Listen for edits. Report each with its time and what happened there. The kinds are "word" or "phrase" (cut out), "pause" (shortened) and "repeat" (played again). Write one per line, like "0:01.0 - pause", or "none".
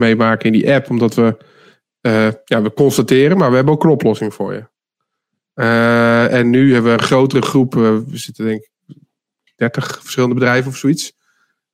none